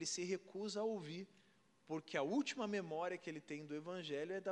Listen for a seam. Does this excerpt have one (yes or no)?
no